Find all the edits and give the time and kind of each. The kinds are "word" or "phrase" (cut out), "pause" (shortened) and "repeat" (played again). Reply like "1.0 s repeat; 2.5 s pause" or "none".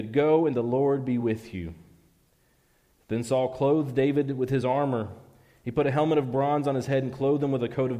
none